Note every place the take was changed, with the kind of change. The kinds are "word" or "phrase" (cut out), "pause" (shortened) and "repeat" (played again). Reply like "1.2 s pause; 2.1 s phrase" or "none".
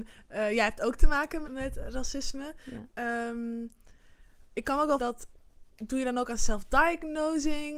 1.4 s word; 5.0 s word; 5.7 s pause